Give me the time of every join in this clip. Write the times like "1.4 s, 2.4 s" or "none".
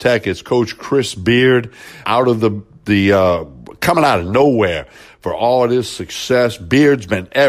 2.0 s